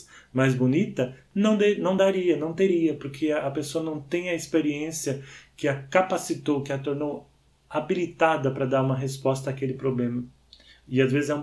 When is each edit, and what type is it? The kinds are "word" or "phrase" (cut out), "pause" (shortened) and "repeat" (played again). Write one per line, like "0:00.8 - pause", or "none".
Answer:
none